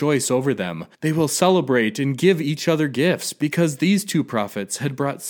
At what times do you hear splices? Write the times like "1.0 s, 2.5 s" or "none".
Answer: 0.9 s